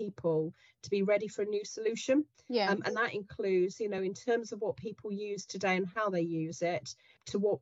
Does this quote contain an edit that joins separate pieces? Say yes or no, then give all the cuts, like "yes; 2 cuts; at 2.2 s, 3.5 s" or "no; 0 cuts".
no; 0 cuts